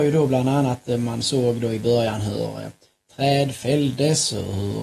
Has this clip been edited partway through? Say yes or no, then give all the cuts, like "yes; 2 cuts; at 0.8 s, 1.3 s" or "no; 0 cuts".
no; 0 cuts